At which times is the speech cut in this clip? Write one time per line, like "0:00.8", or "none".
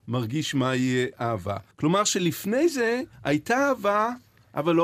0:01.7
0:03.1